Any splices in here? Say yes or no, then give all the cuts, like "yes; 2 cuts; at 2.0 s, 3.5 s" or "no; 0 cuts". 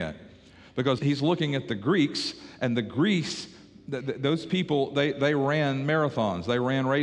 yes; 1 cut; at 1.0 s